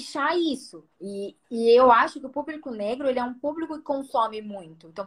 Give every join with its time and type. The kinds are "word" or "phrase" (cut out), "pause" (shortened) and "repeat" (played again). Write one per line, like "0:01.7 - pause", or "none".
0:00.9 - pause